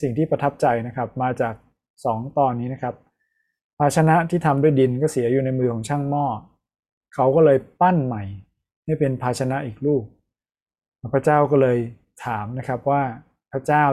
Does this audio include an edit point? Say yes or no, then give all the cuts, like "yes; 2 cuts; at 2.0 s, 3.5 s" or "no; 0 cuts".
no; 0 cuts